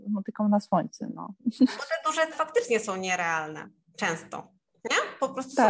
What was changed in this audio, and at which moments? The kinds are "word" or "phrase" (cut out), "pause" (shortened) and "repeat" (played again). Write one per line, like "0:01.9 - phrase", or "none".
0:02.3 - word